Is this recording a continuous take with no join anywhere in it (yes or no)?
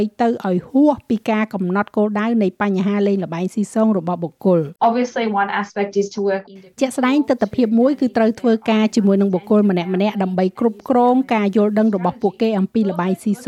no